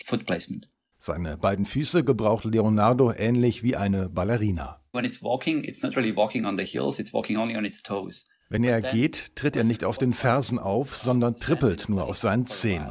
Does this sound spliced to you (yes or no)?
no